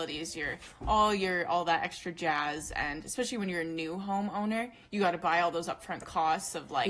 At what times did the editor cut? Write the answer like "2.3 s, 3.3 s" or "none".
none